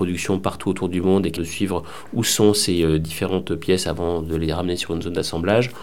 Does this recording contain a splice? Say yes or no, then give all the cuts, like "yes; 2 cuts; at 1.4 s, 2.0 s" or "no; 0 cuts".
yes; 1 cut; at 1.4 s